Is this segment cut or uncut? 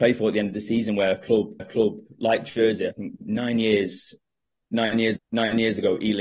cut